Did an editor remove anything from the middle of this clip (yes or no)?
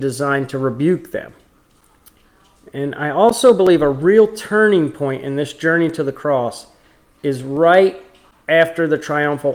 no